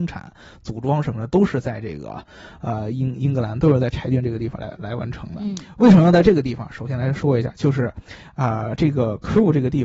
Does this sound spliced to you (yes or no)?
no